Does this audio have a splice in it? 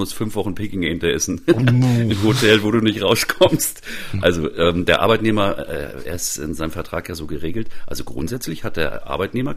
no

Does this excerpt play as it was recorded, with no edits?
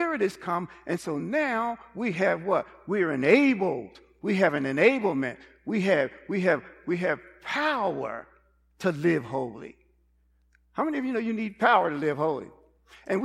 yes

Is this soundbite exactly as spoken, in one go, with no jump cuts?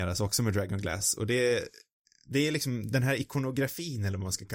yes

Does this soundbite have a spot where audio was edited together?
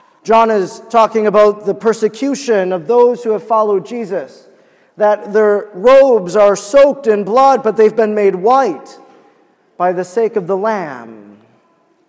no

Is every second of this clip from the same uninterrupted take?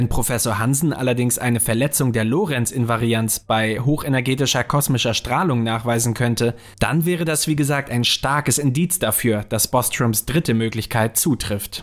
yes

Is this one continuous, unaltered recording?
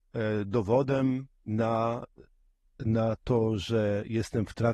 yes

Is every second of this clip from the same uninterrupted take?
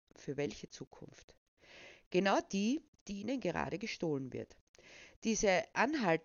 yes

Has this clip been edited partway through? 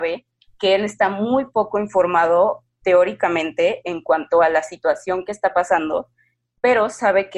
no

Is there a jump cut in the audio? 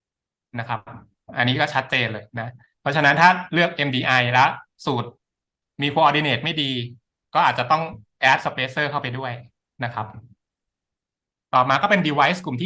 no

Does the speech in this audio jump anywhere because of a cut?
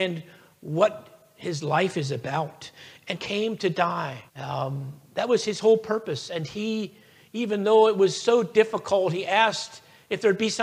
yes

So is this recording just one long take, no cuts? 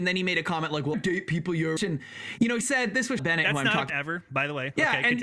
no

